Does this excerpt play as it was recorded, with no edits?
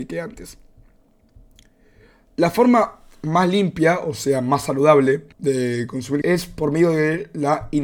no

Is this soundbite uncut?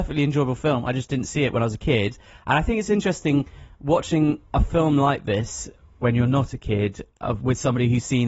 yes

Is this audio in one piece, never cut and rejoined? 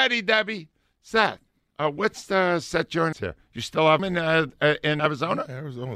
no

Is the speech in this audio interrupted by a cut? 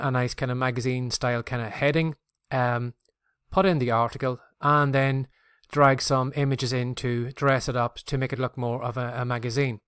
no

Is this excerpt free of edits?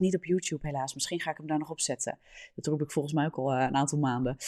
yes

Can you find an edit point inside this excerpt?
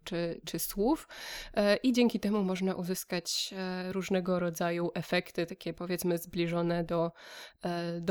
no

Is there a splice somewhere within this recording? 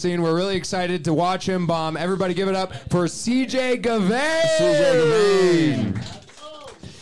no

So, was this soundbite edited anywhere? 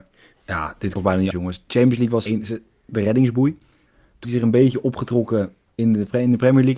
yes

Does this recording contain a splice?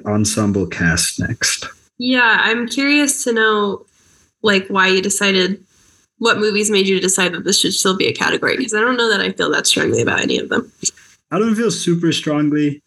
no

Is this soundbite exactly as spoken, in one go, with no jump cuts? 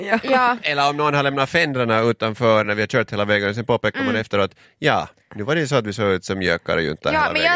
yes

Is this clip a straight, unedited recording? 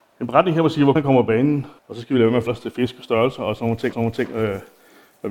no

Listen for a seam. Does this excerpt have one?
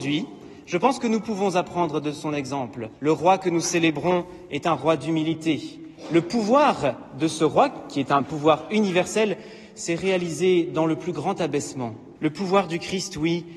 yes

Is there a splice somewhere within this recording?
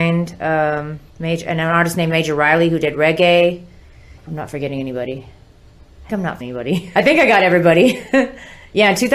yes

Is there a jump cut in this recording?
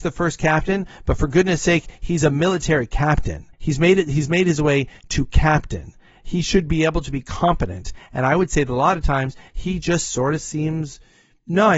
yes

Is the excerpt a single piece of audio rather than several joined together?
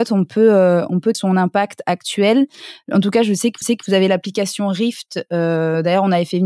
no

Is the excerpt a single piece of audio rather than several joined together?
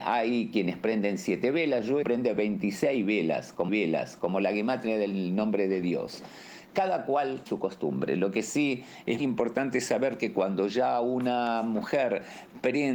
no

